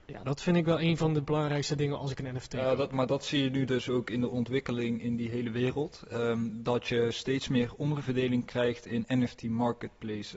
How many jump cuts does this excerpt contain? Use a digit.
0